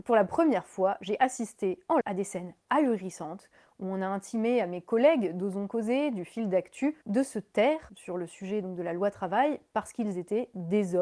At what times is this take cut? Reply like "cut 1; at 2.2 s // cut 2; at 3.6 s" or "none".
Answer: cut 1; at 2.0 s